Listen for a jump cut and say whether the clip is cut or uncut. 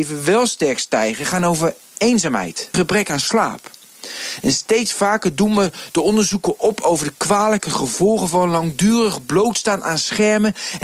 cut